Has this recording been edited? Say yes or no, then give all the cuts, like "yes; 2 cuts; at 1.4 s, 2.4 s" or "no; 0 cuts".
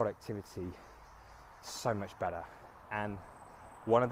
no; 0 cuts